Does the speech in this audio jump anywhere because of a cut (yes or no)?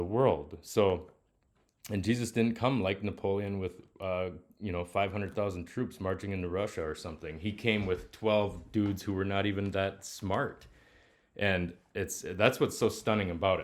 no